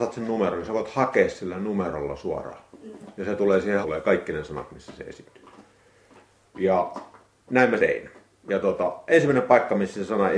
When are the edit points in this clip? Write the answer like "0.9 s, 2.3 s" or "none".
3.8 s, 7.8 s